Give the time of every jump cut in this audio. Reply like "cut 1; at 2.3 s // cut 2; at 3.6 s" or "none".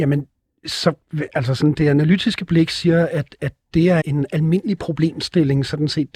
cut 1; at 4.0 s